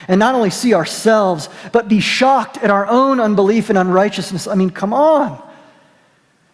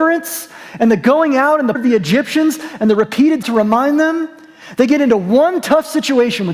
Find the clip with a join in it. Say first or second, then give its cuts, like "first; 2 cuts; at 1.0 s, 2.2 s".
second; 2 cuts; at 1.7 s, 3.4 s